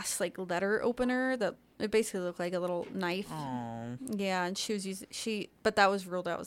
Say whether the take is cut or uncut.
uncut